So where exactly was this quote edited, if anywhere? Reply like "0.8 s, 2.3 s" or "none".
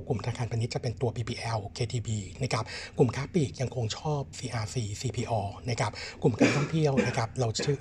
1.7 s, 4.3 s